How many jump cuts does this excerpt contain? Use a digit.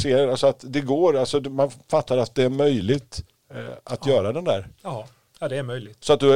0